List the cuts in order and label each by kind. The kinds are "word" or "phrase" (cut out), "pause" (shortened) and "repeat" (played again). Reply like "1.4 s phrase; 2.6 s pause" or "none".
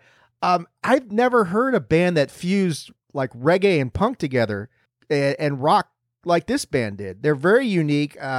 none